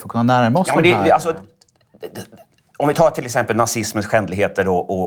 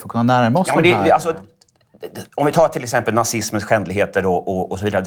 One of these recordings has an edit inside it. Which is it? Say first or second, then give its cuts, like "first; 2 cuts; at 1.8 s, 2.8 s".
second; 1 cut; at 2.3 s